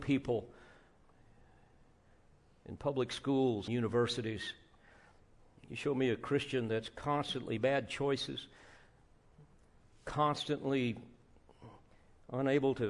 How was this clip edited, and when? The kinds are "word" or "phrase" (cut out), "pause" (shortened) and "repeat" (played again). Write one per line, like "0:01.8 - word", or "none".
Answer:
0:03.7 - phrase
0:07.6 - word

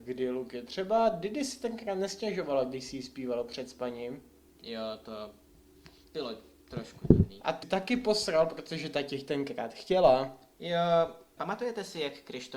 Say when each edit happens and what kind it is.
0:07.6 - word
0:11.4 - word

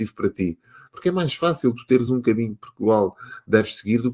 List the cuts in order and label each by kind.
none

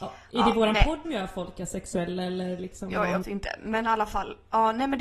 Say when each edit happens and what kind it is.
0:01.0 - word
0:03.2 - word

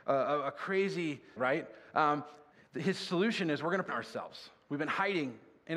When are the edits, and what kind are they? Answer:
0:01.4 - word
0:02.5 - pause
0:03.9 - word

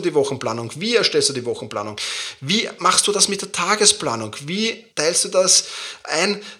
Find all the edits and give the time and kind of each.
0:04.9 - pause

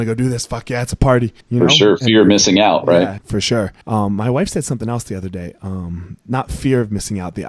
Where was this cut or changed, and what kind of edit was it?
0:01.4 - pause
0:03.2 - word
0:03.8 - pause

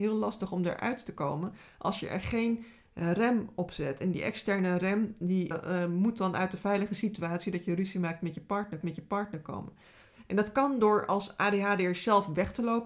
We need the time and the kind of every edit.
0:05.5 - word
0:08.8 - repeat

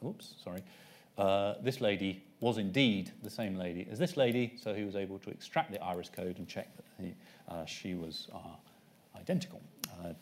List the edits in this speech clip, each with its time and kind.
none

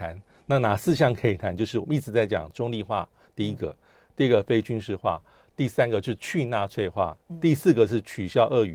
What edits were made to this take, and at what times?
none

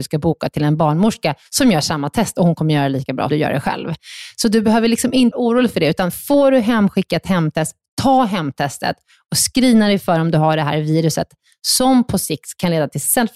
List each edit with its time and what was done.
0:03.3 - word
0:05.3 - word

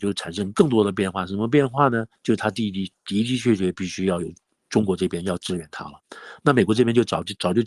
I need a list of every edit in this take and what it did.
0:02.2 - pause

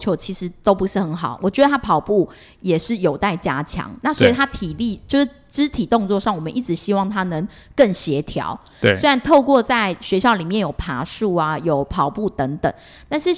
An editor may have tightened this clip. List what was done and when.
none

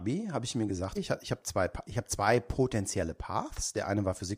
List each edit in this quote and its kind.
0:01.0 - word

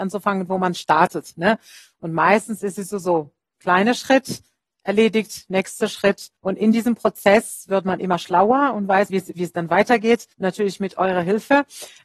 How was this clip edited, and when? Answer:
0:06.4 - pause
0:09.1 - word
0:10.3 - pause

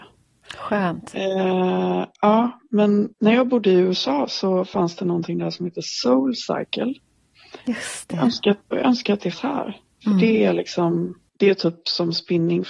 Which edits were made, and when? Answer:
0:03.1 - pause
0:08.6 - pause
0:09.3 - word
0:11.3 - pause

